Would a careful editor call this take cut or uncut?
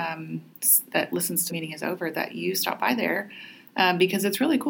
cut